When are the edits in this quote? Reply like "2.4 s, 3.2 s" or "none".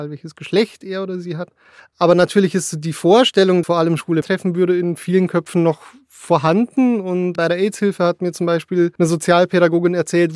1.8 s, 3.6 s, 4.2 s, 7.4 s, 9.0 s